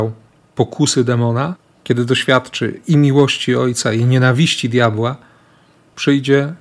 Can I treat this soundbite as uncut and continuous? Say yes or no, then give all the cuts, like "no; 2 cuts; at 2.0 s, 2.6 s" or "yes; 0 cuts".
no; 1 cut; at 1.7 s